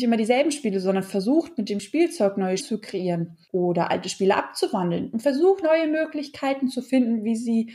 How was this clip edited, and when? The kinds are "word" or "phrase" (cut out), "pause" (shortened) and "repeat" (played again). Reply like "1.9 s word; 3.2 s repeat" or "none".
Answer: 2.6 s word; 3.4 s pause; 5.6 s word